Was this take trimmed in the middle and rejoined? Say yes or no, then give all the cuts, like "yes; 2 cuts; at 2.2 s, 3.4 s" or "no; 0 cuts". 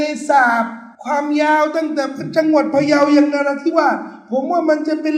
yes; 1 cut; at 0.9 s